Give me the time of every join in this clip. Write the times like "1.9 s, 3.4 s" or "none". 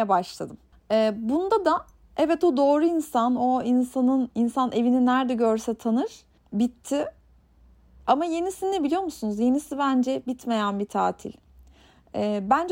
none